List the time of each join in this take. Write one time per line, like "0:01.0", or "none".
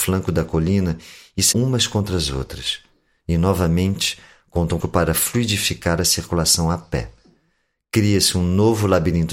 0:01.5
0:04.8